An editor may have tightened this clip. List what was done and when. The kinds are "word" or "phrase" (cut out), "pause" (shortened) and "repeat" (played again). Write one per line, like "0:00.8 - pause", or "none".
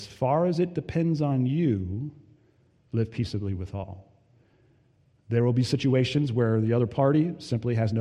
none